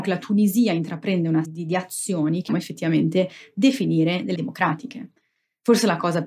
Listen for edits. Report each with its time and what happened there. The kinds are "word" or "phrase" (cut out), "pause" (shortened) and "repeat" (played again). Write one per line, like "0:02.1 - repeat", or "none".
0:01.4 - phrase
0:02.5 - word
0:04.3 - word